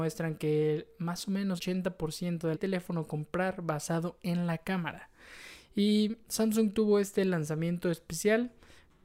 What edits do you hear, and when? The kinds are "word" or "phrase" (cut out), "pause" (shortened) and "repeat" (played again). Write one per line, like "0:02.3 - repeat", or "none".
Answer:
0:01.6 - word
0:02.5 - phrase
0:06.3 - word